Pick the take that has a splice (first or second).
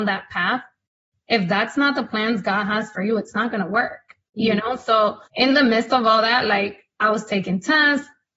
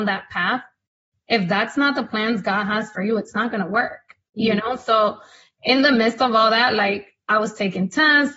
first